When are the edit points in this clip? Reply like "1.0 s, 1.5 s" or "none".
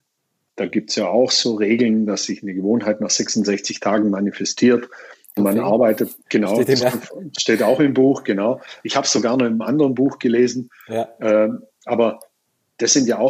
5.4 s, 6.2 s, 6.8 s